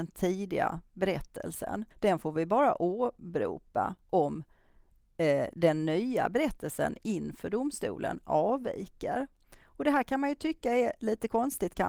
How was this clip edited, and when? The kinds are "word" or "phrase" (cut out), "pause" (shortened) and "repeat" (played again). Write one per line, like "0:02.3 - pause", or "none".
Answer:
0:01.9 - pause